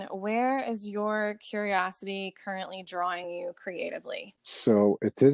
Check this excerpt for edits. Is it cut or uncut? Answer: uncut